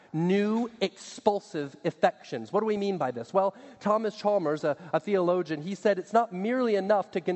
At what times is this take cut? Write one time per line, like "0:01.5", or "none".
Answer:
none